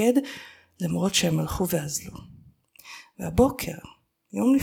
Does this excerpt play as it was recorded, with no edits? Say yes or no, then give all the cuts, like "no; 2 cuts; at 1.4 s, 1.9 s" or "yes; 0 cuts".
yes; 0 cuts